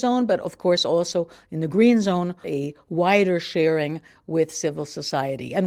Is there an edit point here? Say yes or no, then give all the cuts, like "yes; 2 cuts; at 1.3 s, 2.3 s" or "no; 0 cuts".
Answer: yes; 1 cut; at 2.4 s